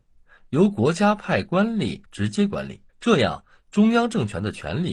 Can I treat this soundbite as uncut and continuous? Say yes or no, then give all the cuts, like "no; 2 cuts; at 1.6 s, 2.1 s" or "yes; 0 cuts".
no; 2 cuts; at 2.1 s, 2.9 s